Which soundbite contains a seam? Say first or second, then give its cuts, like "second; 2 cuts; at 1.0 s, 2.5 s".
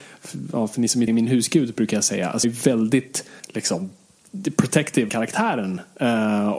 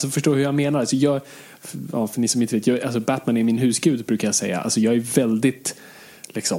first; 4 cuts; at 1.1 s, 2.4 s, 3.4 s, 5.1 s